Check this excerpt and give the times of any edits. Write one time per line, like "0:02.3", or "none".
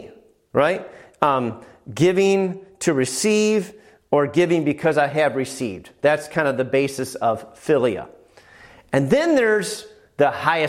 none